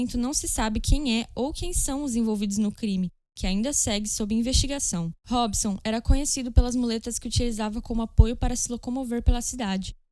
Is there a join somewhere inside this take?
yes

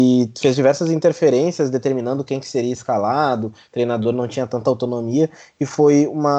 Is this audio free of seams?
yes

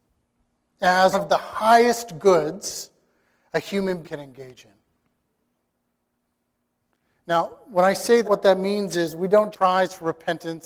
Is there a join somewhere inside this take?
yes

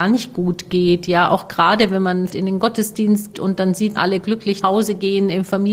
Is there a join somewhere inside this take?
yes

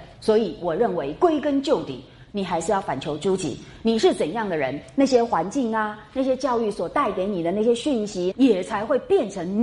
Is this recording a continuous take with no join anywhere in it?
no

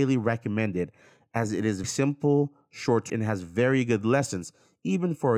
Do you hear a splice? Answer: yes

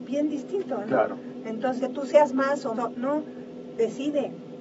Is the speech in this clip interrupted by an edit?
yes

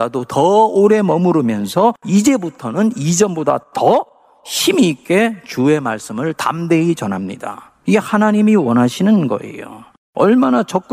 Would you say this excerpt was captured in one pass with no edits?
no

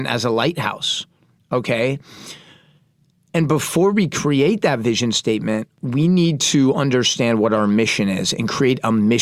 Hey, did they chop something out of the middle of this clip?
no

